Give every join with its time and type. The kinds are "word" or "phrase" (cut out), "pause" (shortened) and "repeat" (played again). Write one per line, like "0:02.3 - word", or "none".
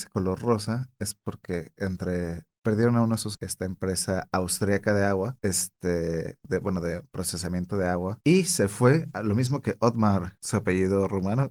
0:03.3 - phrase